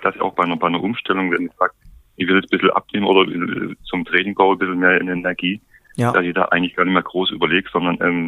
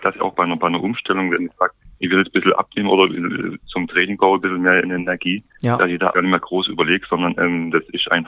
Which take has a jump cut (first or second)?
second